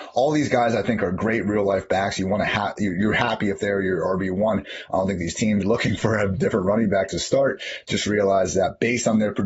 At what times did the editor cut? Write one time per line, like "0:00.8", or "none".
0:05.6